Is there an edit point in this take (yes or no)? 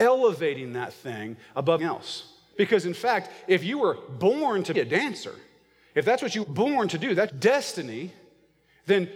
yes